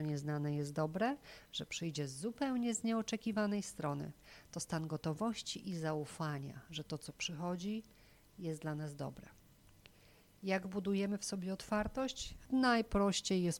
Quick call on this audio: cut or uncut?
uncut